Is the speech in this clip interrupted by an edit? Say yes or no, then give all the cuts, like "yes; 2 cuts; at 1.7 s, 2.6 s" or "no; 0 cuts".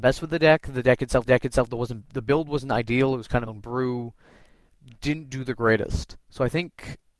yes; 3 cuts; at 1.3 s, 3.5 s, 6.2 s